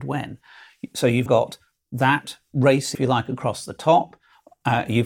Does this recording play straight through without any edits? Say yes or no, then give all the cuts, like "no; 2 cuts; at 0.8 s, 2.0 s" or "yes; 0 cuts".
no; 2 cuts; at 1.3 s, 2.9 s